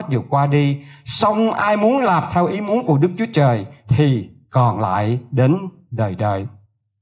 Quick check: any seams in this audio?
no; 0 cuts

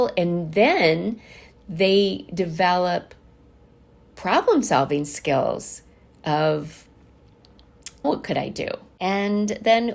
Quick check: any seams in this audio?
yes; 1 cut; at 8.0 s

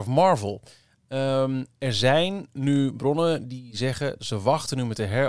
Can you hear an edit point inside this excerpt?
no; 0 cuts

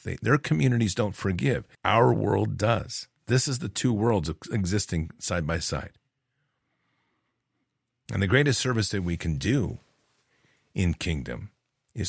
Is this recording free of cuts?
no; 1 cut; at 1.7 s

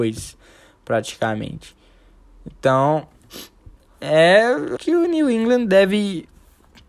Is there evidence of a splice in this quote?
yes; 2 cuts; at 3.9 s, 4.8 s

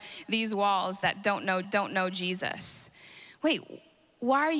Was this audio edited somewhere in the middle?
yes; 1 cut; at 1.6 s

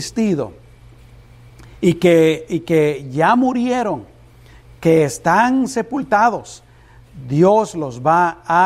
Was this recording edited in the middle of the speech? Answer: no; 0 cuts

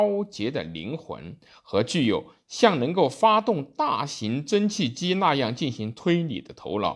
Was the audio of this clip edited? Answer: no; 0 cuts

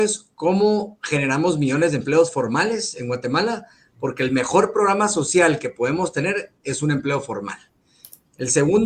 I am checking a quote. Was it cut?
no; 0 cuts

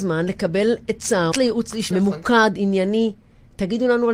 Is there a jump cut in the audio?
yes; 2 cuts; at 1.3 s, 1.9 s

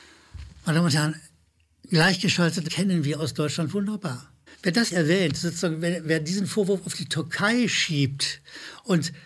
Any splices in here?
yes; 3 cuts; at 2.7 s, 4.5 s, 4.9 s

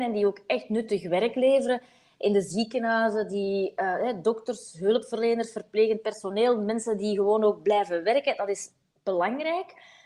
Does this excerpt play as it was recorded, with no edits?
yes; 0 cuts

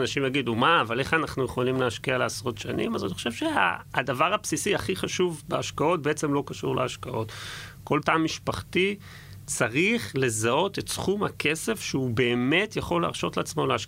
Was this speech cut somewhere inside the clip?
yes; 1 cut; at 8.0 s

